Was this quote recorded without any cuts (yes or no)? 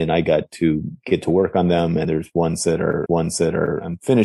no